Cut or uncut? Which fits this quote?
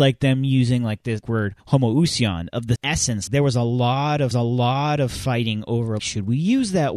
cut